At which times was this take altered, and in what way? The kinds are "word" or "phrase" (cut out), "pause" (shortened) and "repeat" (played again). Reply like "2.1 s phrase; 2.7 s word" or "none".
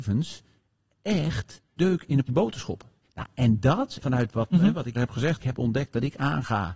1.8 s word; 2.3 s word; 3.0 s pause; 4.0 s word; 4.5 s word; 4.9 s word; 5.4 s phrase